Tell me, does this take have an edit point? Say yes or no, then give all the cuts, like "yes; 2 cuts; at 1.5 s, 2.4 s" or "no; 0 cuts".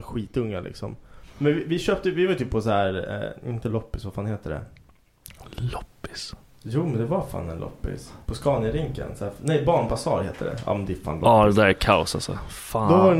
no; 0 cuts